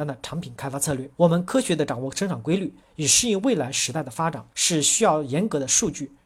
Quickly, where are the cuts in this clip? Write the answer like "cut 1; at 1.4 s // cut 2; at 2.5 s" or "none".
cut 1; at 1.1 s // cut 2; at 4.5 s